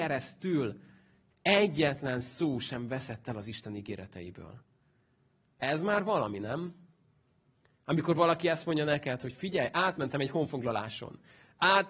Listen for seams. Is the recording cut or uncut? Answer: uncut